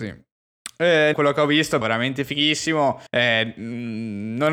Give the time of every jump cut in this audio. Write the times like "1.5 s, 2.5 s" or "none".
1.1 s, 1.8 s, 3.1 s